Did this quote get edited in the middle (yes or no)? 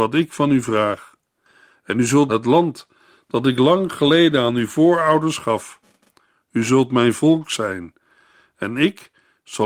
yes